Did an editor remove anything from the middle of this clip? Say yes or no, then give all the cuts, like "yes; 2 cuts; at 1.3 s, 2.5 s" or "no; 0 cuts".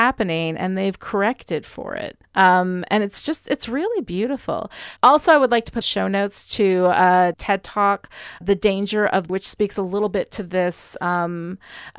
yes; 5 cuts; at 2.2 s, 5.8 s, 7.3 s, 8.4 s, 9.3 s